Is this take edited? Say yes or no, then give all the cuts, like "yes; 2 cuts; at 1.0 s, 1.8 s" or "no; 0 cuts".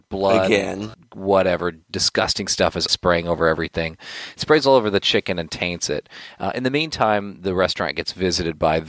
yes; 1 cut; at 2.9 s